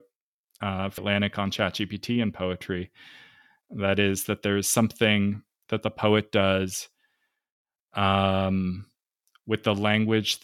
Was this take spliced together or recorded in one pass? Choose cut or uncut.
cut